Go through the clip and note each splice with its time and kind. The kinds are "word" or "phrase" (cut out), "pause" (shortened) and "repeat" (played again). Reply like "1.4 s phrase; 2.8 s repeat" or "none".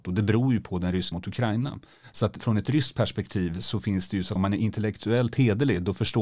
1.1 s word; 2.4 s word; 4.4 s word